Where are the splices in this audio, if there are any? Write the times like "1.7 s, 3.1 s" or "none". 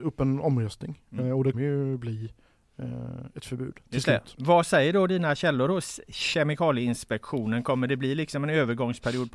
1.5 s